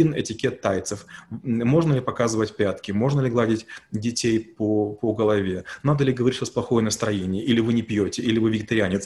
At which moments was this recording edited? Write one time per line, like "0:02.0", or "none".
none